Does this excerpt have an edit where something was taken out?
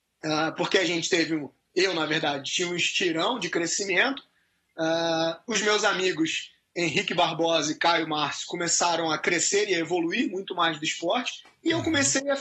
no; 0 cuts

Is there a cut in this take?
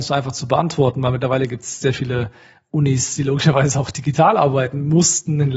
no; 0 cuts

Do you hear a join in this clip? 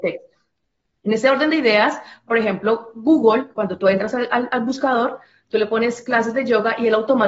no; 0 cuts

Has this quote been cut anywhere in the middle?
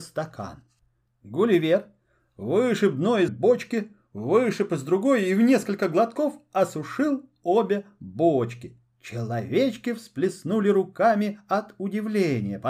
yes; 1 cut; at 3.3 s

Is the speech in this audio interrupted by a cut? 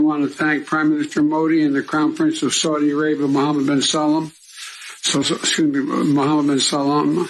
no; 0 cuts

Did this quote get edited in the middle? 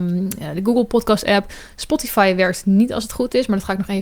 no; 0 cuts

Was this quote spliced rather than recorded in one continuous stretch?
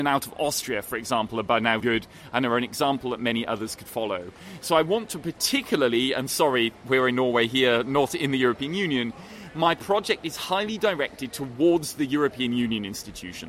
yes; 1 cut; at 1.8 s

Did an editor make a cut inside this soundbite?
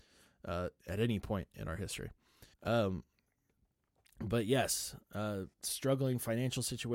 yes; 2 cuts; at 2.5 s, 5.5 s

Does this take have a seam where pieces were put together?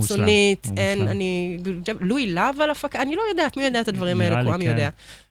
yes; 1 cut; at 1.9 s

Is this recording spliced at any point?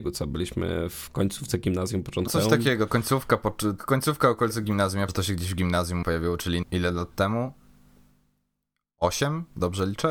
yes; 6 cuts; at 2.3 s, 2.9 s, 3.8 s, 5.1 s, 6.0 s, 6.6 s

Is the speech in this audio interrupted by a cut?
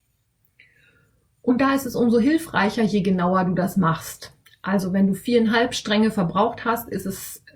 no; 0 cuts

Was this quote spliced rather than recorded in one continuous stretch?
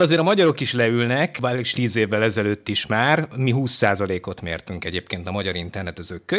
yes; 1 cut; at 1.7 s

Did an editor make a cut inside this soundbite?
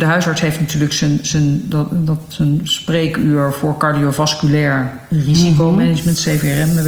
no; 0 cuts

